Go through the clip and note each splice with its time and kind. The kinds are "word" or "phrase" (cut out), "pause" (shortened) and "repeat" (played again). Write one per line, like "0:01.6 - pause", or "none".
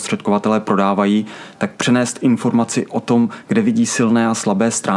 none